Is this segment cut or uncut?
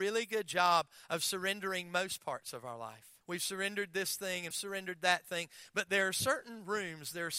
cut